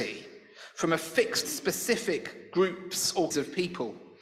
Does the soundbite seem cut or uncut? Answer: cut